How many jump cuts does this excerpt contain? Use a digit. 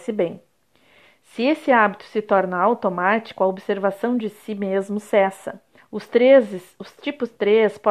1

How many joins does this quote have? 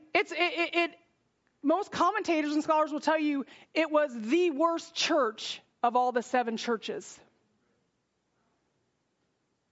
0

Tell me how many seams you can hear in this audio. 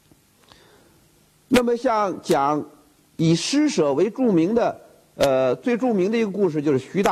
0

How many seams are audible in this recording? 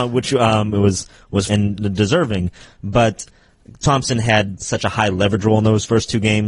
2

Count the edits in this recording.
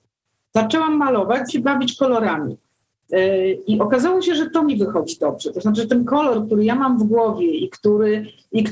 1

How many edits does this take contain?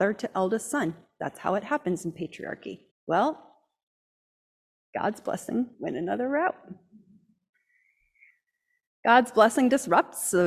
2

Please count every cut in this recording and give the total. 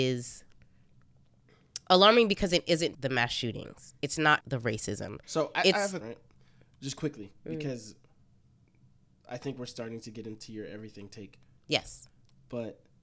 3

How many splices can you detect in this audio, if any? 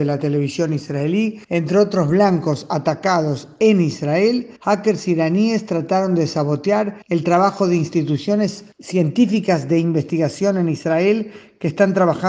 4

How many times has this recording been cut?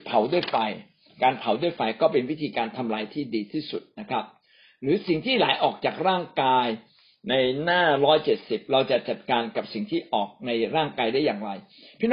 0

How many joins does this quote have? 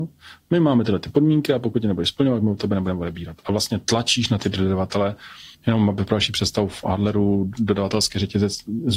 1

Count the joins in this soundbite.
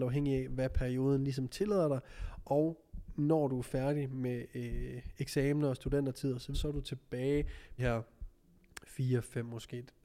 2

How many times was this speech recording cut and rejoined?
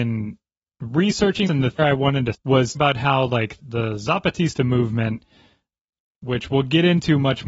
5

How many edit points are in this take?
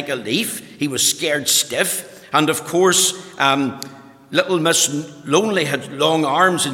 0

